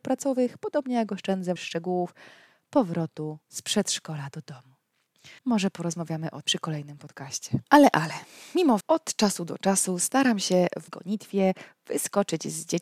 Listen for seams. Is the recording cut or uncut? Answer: cut